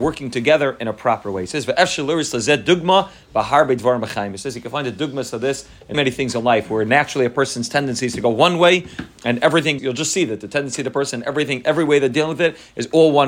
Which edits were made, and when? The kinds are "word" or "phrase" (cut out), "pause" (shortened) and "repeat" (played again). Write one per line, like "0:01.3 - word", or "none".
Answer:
0:05.9 - word
0:09.8 - word